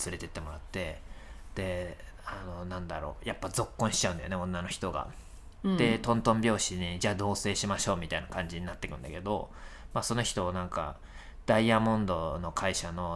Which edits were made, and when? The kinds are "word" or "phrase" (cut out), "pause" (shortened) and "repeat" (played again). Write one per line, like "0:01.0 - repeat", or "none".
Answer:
none